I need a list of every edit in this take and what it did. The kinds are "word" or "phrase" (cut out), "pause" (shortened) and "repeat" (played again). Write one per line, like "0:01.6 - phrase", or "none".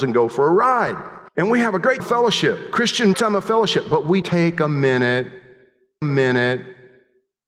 0:01.3 - pause
0:02.0 - word
0:03.1 - phrase
0:04.2 - word
0:06.0 - repeat